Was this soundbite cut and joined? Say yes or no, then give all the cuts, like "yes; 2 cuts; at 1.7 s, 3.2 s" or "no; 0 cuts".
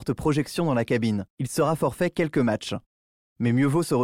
no; 0 cuts